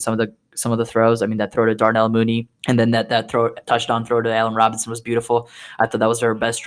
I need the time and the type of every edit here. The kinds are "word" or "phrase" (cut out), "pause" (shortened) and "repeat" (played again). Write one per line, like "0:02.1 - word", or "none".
0:02.6 - pause